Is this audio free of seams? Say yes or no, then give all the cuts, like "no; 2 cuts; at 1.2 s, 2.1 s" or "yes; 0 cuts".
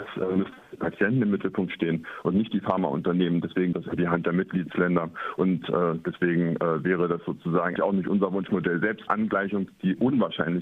no; 3 cuts; at 3.7 s, 7.8 s, 9.1 s